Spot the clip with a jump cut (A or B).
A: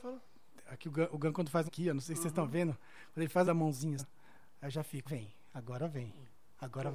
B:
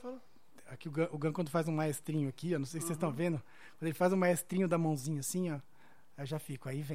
A